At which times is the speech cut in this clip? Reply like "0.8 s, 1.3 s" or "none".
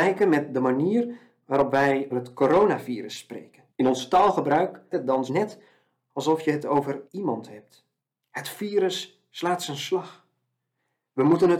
2.1 s, 3.7 s, 4.9 s, 5.3 s, 7.1 s, 8.0 s